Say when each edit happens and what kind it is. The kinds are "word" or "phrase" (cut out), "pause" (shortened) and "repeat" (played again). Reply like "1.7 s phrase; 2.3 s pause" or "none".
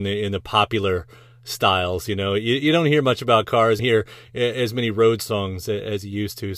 3.8 s phrase